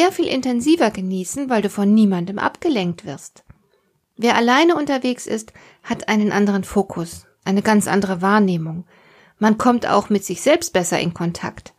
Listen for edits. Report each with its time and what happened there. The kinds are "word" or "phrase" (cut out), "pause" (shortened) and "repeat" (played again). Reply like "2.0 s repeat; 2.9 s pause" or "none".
none